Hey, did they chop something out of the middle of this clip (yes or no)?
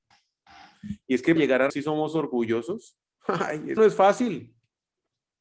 yes